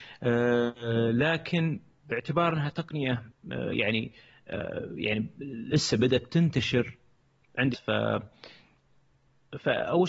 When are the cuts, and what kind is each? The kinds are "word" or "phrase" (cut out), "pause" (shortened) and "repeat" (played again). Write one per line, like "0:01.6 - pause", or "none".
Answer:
0:07.7 - word